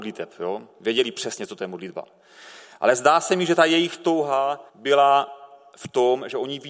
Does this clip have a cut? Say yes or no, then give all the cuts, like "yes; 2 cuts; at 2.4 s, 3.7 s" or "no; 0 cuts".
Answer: yes; 1 cut; at 4.7 s